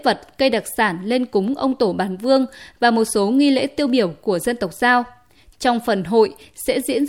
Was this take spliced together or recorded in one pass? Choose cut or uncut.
uncut